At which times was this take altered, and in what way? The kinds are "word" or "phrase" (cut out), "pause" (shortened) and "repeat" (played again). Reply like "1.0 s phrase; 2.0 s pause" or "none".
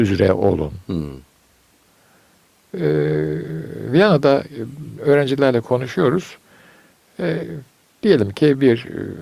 none